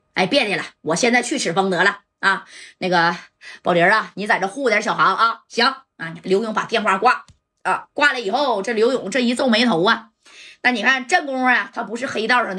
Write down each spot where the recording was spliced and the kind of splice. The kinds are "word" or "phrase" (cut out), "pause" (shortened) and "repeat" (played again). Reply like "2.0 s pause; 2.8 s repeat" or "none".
none